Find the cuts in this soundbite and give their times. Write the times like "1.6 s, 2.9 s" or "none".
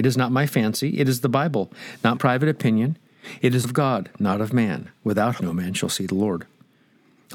2.2 s, 3.6 s, 5.4 s